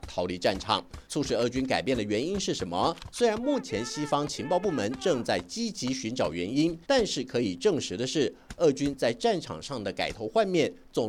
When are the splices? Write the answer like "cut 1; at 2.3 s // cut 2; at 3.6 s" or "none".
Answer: cut 1; at 1.0 s // cut 2; at 6.8 s